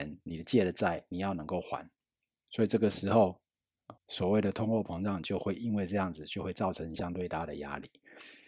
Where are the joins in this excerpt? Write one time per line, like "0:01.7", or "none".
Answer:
0:04.0